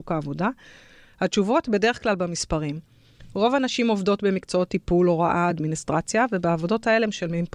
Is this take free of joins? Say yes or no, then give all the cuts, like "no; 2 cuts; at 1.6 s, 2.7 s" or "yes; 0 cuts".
yes; 0 cuts